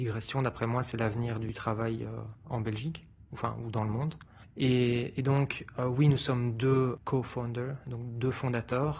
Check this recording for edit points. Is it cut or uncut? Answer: uncut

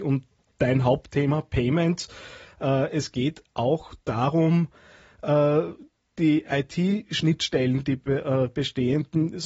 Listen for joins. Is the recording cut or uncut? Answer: uncut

